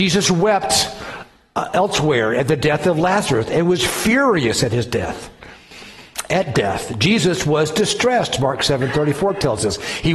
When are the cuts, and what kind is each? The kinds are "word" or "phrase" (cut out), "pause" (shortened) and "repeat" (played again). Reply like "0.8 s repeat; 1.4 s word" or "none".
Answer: none